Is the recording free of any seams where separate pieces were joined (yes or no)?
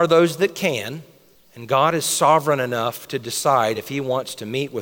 yes